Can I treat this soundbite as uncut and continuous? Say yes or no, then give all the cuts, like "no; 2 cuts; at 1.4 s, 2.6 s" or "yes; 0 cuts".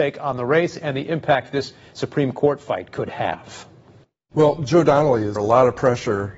no; 1 cut; at 5.4 s